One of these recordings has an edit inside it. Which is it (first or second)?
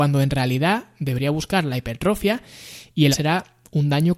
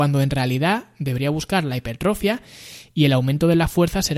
first